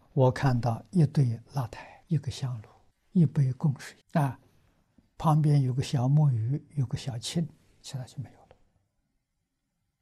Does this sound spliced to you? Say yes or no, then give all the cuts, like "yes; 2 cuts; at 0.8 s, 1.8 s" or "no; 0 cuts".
yes; 3 cuts; at 2.0 s, 2.9 s, 4.0 s